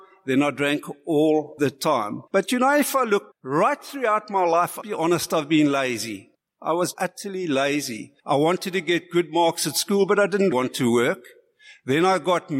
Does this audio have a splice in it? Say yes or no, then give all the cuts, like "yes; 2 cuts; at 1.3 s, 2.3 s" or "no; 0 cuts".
yes; 8 cuts; at 1.6 s, 2.3 s, 3.3 s, 4.8 s, 6.3 s, 6.9 s, 8.2 s, 10.5 s